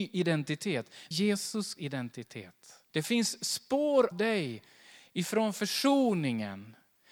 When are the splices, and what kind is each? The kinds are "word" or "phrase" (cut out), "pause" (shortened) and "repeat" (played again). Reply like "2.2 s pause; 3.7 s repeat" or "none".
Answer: 1.1 s word; 1.8 s word; 2.9 s pause; 4.1 s word